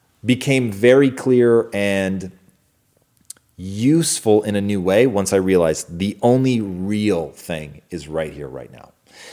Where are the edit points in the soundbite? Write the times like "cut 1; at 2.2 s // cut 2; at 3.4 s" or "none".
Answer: none